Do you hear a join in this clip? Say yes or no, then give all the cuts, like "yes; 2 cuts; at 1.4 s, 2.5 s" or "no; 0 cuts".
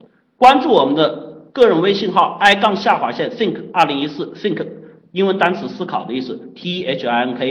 no; 0 cuts